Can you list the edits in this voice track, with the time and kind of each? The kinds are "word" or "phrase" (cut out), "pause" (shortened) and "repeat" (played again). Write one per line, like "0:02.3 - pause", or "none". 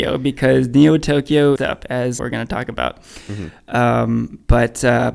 0:01.6 - phrase
0:02.2 - word